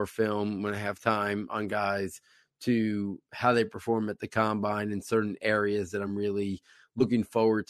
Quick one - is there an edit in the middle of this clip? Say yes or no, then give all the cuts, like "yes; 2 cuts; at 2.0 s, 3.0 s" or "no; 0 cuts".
no; 0 cuts